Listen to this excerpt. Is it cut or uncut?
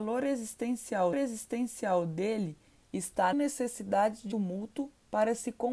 cut